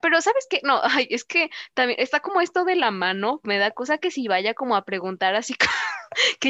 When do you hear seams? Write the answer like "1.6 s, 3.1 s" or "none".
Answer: 3.4 s